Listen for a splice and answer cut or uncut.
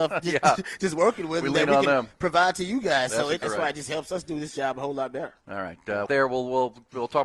cut